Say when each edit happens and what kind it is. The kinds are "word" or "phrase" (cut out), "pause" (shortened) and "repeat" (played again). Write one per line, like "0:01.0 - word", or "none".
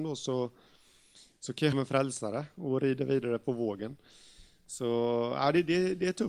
0:01.7 - phrase